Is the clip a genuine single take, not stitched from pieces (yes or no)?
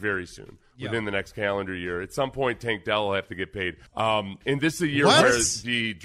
yes